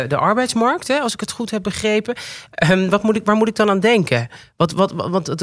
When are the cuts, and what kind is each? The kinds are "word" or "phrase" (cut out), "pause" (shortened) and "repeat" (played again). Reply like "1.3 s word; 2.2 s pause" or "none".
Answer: none